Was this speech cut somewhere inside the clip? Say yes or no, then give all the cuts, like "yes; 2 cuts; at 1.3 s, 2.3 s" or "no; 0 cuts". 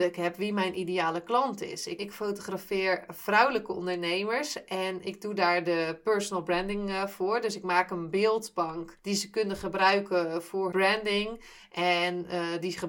yes; 1 cut; at 10.7 s